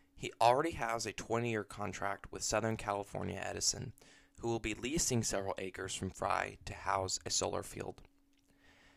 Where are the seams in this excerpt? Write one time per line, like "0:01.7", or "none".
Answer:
none